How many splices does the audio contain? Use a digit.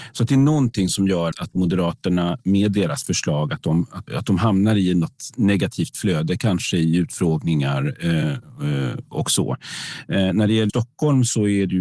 3